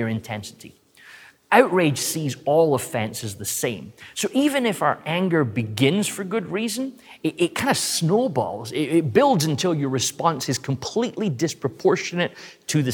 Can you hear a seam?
no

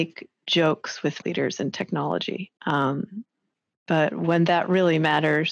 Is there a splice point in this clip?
yes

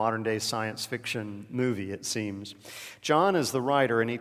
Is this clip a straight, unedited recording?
yes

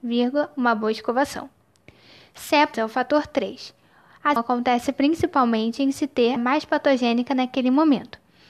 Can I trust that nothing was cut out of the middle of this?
no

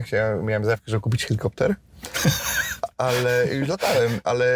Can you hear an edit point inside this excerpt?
no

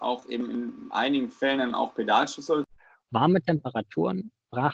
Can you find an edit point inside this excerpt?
yes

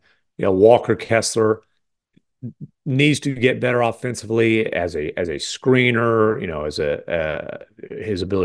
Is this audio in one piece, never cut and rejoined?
yes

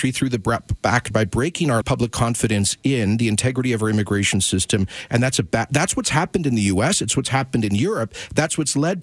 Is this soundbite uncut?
no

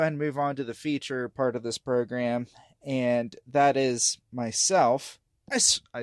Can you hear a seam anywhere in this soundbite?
no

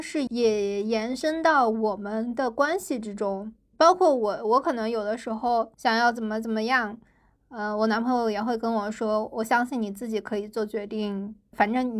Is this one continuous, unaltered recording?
yes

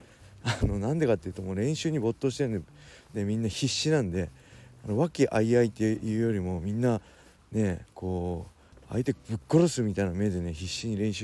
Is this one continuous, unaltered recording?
yes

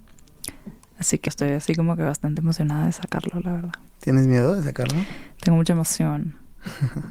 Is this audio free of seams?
no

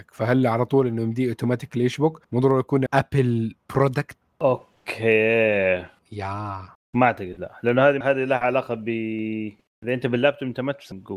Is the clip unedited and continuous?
no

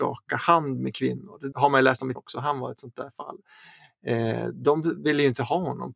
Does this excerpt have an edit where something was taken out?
yes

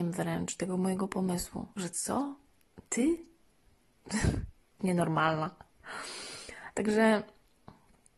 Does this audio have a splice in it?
yes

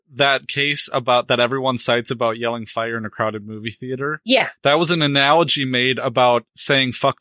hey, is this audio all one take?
yes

